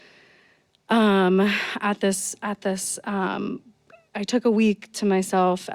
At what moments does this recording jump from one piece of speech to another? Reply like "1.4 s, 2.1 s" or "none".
none